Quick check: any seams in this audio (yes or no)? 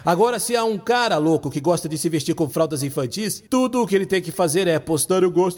yes